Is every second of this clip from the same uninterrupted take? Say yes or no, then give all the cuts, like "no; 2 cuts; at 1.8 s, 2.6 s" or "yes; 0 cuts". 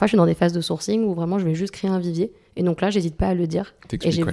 yes; 0 cuts